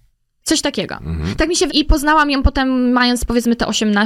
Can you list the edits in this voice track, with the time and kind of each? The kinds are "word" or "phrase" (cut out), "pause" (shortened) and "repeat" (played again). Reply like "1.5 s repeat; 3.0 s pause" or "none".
1.7 s word